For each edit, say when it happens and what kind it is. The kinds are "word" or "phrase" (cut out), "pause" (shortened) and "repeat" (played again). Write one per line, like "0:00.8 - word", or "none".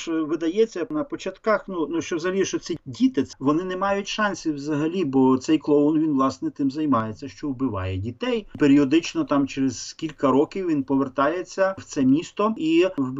none